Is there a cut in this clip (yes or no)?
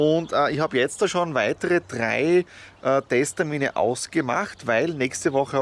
no